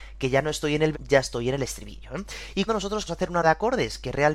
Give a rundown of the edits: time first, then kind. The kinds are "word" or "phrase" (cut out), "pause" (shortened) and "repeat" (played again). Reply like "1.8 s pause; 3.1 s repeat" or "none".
0.9 s word; 2.7 s word; 3.1 s word; 3.4 s word